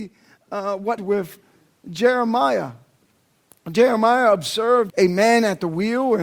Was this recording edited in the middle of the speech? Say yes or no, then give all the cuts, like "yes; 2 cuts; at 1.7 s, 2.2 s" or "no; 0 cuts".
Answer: yes; 2 cuts; at 1.0 s, 4.9 s